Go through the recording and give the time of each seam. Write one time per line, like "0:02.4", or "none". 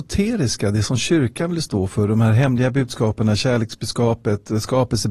none